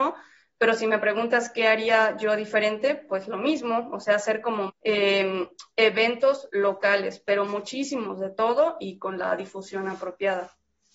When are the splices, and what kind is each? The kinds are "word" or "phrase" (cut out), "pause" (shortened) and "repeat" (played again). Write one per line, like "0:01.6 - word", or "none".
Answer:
0:04.7 - word